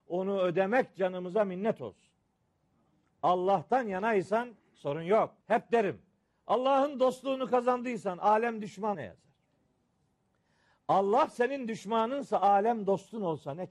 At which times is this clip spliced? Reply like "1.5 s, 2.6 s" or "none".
5.4 s, 8.9 s